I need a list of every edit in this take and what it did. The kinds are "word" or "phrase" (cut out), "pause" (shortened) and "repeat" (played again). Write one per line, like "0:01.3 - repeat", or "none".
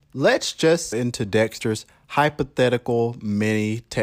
0:00.9 - phrase